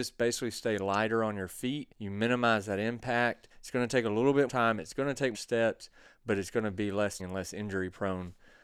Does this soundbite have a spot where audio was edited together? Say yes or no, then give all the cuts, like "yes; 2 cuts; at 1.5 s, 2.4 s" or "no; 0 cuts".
yes; 5 cuts; at 1.9 s, 3.5 s, 4.5 s, 5.3 s, 7.2 s